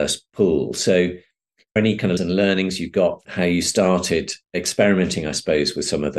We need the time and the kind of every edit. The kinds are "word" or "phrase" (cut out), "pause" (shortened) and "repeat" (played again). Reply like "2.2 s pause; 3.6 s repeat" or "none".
1.8 s phrase; 2.2 s word; 3.2 s word; 4.4 s pause